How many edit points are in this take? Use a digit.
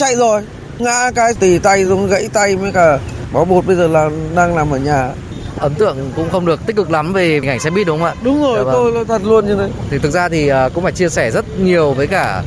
0